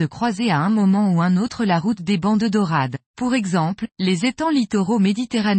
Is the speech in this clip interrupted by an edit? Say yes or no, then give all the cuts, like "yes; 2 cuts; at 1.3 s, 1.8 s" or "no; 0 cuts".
yes; 2 cuts; at 3.1 s, 3.9 s